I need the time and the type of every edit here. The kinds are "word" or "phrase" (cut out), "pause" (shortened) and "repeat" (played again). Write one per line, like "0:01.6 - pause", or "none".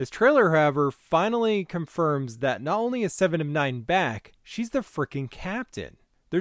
none

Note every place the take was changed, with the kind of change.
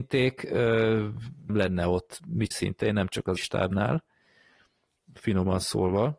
0:01.5 - word
0:02.5 - word
0:03.4 - word

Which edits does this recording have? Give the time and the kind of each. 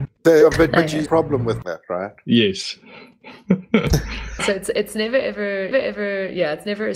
0:01.1 - phrase
0:01.6 - word
0:04.4 - word
0:05.7 - repeat

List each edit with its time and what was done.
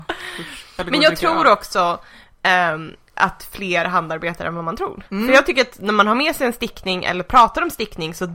0:05.1 - pause

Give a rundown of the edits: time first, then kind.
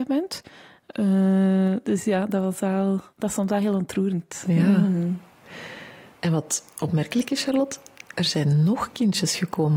0:03.1 - pause
0:06.1 - pause

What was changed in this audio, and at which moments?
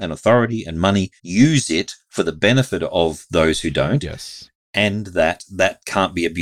0:01.2 - pause

